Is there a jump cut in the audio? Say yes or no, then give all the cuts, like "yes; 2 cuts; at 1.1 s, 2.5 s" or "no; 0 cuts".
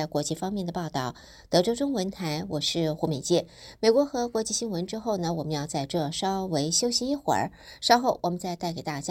no; 0 cuts